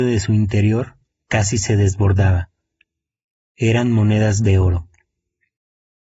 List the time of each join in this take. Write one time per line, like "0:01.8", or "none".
none